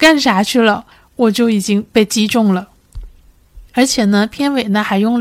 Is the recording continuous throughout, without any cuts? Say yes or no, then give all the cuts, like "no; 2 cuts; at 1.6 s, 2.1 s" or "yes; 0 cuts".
no; 2 cuts; at 0.9 s, 3.7 s